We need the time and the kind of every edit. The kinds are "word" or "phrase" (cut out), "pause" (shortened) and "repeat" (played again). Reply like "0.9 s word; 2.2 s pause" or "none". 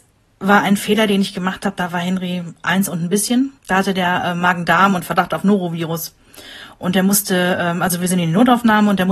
3.6 s pause